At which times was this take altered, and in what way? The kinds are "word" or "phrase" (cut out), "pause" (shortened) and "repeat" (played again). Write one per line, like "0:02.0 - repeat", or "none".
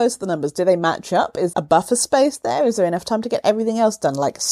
0:01.5 - word